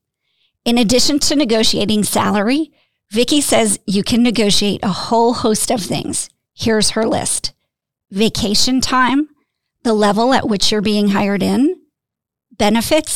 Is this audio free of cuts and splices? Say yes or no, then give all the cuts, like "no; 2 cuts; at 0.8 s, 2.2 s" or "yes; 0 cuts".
yes; 0 cuts